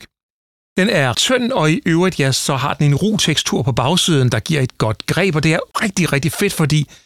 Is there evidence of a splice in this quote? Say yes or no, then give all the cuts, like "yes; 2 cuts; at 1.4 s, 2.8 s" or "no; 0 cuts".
yes; 2 cuts; at 1.1 s, 5.7 s